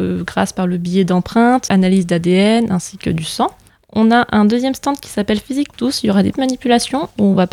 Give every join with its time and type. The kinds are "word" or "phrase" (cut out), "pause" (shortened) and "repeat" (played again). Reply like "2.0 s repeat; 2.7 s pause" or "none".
1.7 s word; 3.7 s pause; 5.7 s word; 6.3 s word